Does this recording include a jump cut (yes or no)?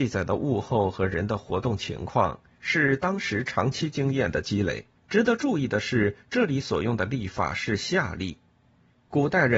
yes